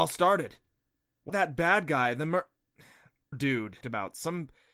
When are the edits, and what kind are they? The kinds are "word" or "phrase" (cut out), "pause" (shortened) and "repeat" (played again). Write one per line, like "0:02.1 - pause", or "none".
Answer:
0:01.3 - word
0:03.3 - word
0:03.8 - word

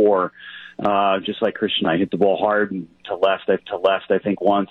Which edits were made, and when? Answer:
0:01.8 - phrase
0:03.6 - repeat

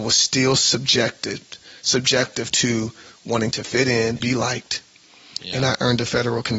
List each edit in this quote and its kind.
0:04.2 - word

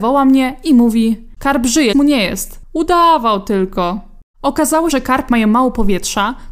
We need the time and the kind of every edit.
0:01.4 - word
0:01.9 - word
0:04.9 - word
0:05.3 - word

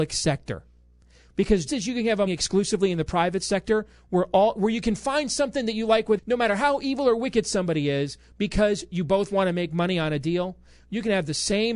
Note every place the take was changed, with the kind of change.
0:01.7 - word
0:02.3 - phrase
0:06.2 - phrase

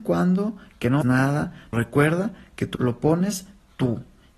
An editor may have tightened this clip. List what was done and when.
0:01.0 - word
0:01.7 - word
0:02.7 - word

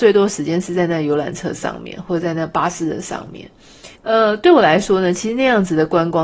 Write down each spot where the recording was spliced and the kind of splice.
0:04.0 - pause

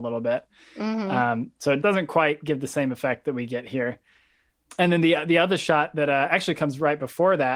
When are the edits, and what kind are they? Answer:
0:01.8 - word

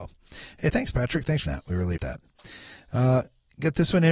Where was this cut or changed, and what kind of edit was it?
0:01.5 - word
0:02.0 - word

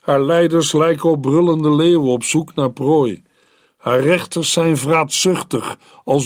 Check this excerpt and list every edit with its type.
none

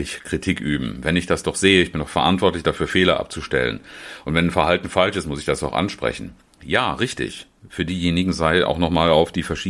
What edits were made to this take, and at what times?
none

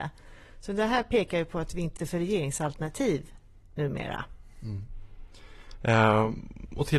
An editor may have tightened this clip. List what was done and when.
0:02.0 - phrase

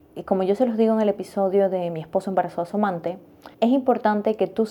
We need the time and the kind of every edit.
0:03.5 - pause

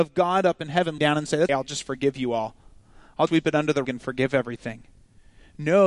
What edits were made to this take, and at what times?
0:01.0 - word
0:01.5 - word
0:03.3 - word
0:03.8 - word

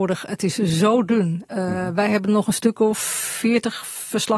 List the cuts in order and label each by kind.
none

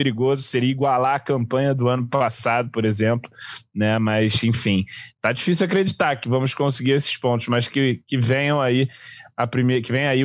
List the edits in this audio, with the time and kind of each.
none

